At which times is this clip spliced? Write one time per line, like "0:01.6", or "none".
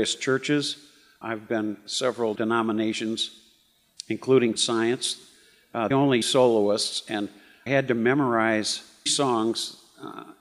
0:01.2
0:02.4
0:04.6
0:05.9
0:06.2
0:07.7
0:09.1